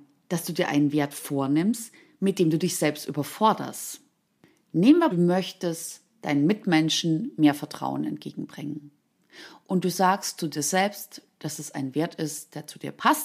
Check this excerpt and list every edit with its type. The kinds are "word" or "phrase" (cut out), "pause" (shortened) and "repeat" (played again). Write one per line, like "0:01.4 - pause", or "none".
0:05.1 - phrase